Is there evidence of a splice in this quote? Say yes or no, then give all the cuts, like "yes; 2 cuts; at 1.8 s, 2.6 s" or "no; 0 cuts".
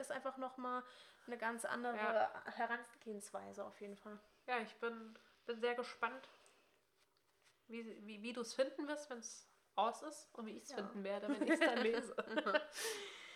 no; 0 cuts